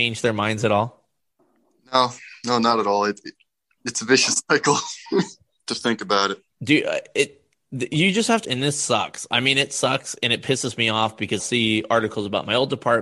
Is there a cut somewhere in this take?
yes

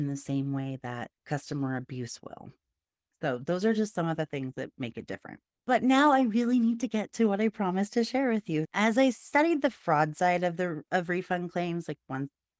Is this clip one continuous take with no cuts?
yes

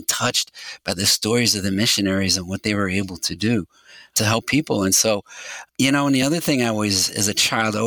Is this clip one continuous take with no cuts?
yes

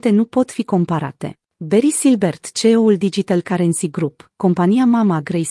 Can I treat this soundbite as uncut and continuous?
no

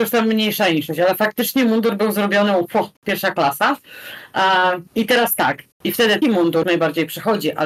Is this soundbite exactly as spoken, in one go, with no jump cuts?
no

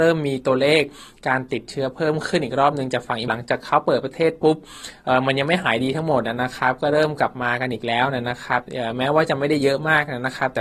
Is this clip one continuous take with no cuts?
no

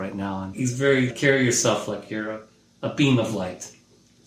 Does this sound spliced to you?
no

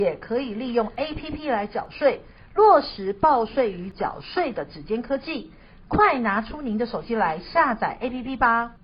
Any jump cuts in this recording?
no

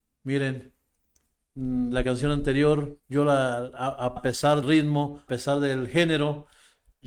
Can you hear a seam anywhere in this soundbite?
yes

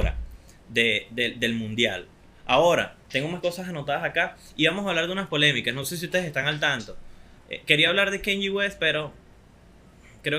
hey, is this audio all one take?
yes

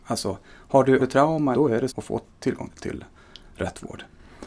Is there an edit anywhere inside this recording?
yes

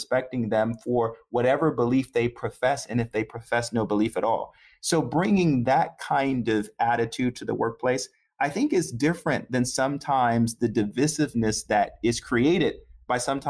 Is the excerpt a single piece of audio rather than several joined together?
yes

